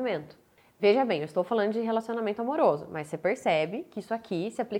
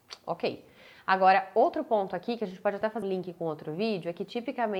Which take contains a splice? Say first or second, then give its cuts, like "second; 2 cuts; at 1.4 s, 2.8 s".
second; 1 cut; at 3.0 s